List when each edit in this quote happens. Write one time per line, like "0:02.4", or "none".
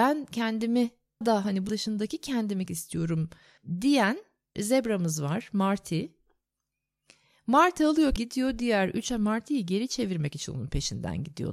0:01.2
0:01.7
0:02.7
0:04.6
0:08.2
0:09.1